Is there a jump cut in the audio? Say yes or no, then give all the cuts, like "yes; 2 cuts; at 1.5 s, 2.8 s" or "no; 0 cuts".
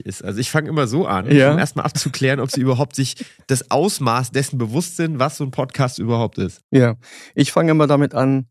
no; 0 cuts